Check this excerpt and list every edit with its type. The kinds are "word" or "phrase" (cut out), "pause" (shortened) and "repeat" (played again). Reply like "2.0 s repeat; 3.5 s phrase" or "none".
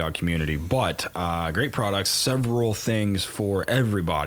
none